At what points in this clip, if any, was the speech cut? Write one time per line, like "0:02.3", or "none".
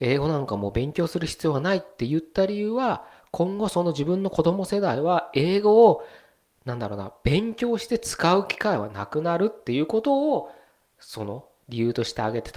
none